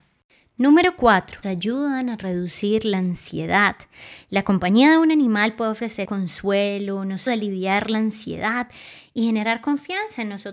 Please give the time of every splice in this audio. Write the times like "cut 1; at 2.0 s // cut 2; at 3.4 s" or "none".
cut 1; at 1.4 s // cut 2; at 6.0 s // cut 3; at 7.3 s